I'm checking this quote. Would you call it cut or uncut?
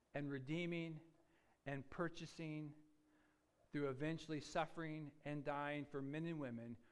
uncut